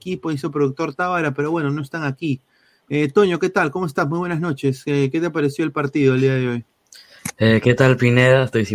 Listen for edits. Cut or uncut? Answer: uncut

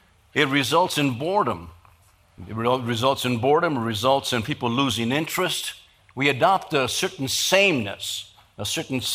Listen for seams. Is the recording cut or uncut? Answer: uncut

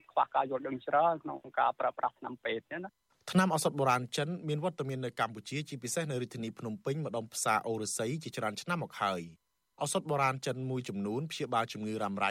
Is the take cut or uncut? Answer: uncut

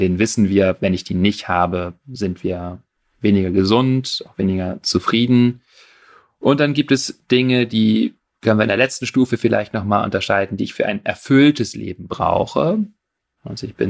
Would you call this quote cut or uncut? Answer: uncut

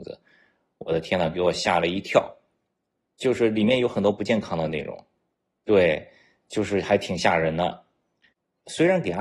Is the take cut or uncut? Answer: uncut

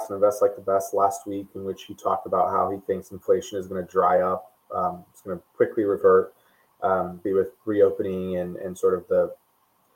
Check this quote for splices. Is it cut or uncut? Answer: cut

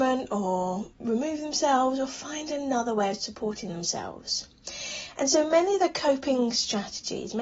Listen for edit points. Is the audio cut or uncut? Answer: uncut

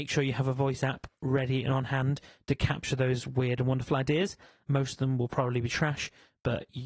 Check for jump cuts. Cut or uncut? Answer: uncut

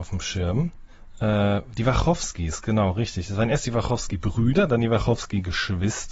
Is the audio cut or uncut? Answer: uncut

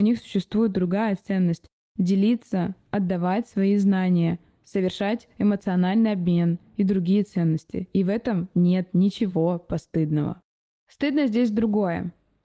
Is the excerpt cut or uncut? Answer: uncut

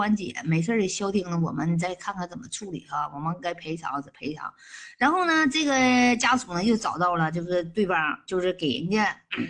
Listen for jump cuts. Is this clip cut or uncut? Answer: uncut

